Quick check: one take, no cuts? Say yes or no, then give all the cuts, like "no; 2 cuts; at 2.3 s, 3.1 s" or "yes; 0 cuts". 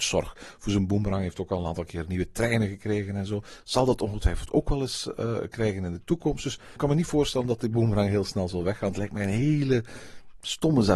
no; 2 cuts; at 5.2 s, 6.8 s